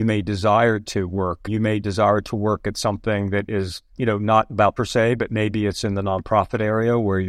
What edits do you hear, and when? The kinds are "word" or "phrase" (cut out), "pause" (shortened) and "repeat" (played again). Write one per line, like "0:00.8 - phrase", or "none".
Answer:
0:01.5 - word
0:03.9 - pause
0:04.8 - phrase